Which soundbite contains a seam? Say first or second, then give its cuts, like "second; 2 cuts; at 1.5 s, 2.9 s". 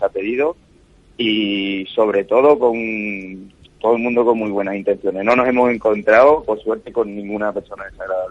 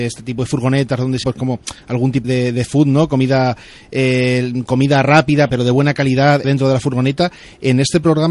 second; 5 cuts; at 1.2 s, 2.2 s, 2.7 s, 5.5 s, 6.4 s